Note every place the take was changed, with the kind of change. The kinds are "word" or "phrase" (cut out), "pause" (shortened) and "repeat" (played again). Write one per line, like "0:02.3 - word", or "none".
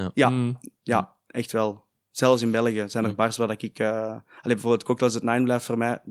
0:02.0 - pause